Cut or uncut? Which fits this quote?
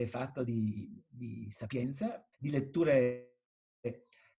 cut